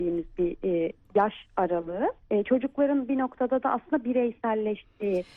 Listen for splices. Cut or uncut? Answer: cut